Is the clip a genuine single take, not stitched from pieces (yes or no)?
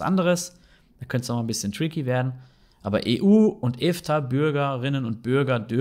yes